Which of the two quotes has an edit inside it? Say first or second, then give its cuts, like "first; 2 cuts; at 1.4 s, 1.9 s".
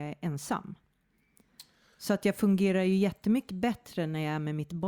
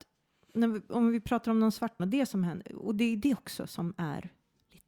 second; 1 cut; at 2.0 s